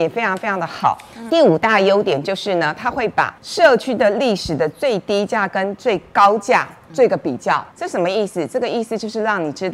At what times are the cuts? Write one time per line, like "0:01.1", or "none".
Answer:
0:01.3
0:03.4
0:07.7